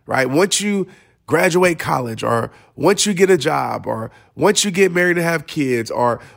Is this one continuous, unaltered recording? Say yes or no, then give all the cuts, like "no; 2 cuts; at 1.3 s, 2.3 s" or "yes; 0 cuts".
yes; 0 cuts